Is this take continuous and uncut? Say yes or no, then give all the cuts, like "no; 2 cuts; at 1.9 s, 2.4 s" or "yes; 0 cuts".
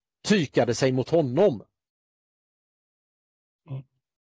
yes; 0 cuts